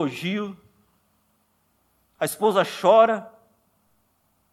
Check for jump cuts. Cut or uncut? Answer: uncut